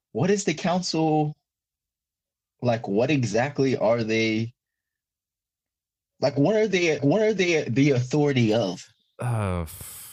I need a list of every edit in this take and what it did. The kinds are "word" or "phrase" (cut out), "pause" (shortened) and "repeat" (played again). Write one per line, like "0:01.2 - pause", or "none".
0:07.0 - repeat